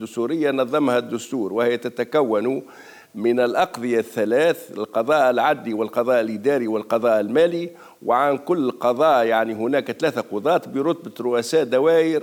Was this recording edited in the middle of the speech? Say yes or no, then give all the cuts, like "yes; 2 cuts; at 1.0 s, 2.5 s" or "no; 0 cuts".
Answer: no; 0 cuts